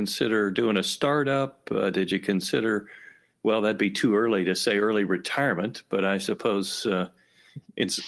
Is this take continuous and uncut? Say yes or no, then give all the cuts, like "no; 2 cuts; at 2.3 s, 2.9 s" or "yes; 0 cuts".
yes; 0 cuts